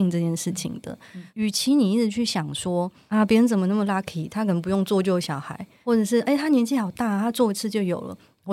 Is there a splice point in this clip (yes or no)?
no